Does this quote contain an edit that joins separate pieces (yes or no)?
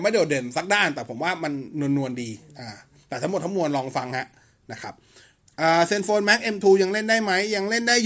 no